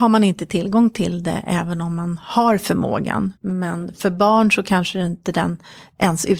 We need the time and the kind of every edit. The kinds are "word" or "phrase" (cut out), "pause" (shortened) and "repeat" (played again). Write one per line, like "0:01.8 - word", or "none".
0:03.4 - pause